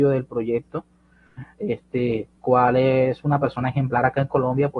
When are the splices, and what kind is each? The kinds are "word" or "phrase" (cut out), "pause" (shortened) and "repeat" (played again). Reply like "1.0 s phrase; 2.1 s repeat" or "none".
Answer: 2.4 s word

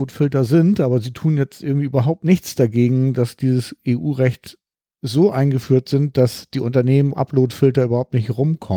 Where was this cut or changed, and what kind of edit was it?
7.1 s word

